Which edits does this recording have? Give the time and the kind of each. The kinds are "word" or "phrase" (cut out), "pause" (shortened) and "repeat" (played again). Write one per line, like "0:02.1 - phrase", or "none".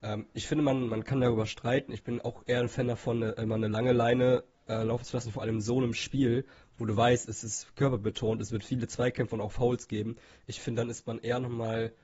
none